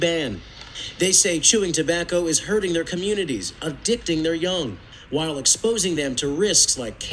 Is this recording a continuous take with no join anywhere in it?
yes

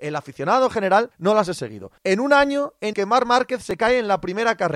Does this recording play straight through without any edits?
no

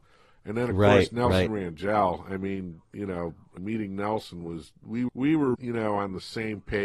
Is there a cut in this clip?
yes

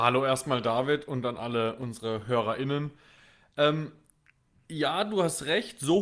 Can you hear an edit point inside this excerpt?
no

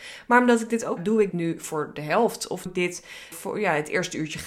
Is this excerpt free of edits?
no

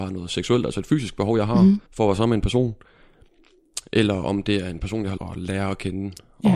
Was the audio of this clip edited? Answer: yes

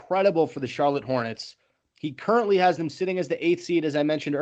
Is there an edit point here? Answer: no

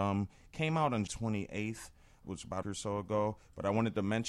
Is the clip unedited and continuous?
no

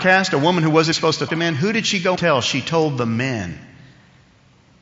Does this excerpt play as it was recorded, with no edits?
no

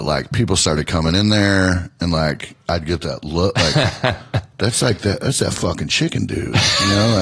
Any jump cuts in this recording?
no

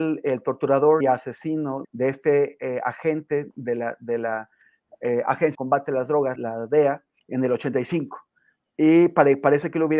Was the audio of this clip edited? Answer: yes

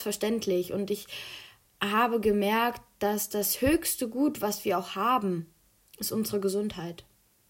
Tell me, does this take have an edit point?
no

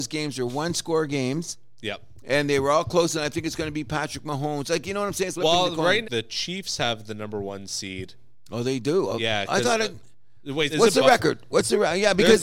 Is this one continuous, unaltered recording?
no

